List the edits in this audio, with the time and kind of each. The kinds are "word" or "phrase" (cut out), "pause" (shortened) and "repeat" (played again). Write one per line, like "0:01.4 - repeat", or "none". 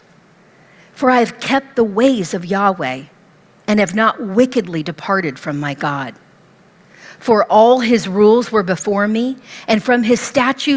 none